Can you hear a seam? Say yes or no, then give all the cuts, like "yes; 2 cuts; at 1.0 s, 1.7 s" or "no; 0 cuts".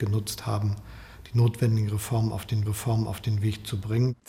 yes; 1 cut; at 2.7 s